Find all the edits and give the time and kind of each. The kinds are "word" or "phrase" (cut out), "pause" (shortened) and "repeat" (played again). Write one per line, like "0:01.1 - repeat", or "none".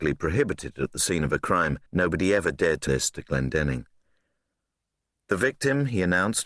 0:01.9 - pause
0:02.9 - word